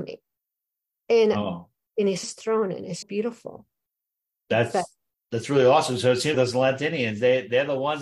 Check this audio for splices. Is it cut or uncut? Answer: cut